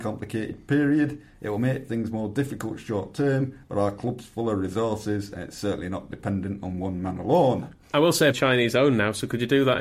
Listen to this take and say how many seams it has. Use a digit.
2